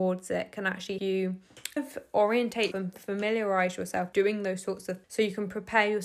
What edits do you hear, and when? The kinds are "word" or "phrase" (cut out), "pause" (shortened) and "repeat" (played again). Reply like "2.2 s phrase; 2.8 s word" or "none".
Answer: 1.0 s word; 1.8 s word; 2.7 s word; 4.1 s word; 5.0 s word